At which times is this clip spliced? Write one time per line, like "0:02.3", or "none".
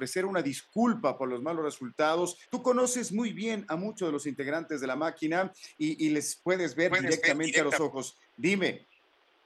0:02.4